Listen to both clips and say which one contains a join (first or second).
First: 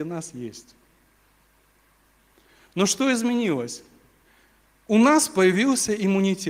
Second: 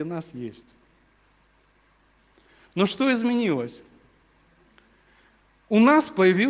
first